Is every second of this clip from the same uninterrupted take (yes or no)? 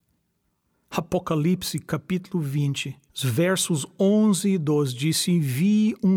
no